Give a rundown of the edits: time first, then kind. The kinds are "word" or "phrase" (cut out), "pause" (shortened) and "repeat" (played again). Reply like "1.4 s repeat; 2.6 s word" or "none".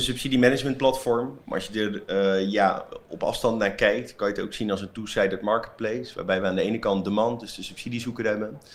none